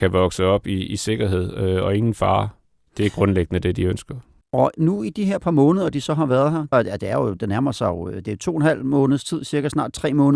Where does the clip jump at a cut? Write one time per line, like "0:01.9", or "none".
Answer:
0:06.7